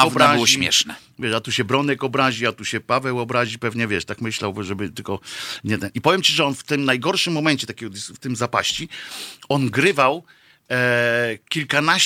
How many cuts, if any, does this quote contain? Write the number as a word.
zero